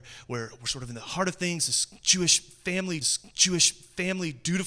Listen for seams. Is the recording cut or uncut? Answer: cut